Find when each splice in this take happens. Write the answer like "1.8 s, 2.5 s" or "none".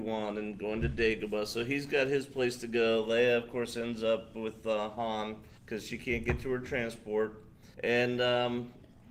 5.6 s, 7.7 s